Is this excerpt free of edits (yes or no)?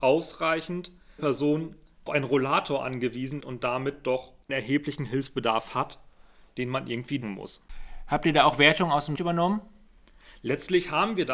no